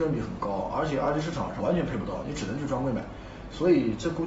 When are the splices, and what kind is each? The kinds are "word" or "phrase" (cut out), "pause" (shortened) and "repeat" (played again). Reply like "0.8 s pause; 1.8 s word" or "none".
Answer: 1.6 s word